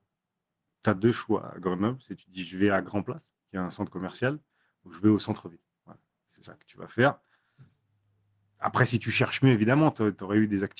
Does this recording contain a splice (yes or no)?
no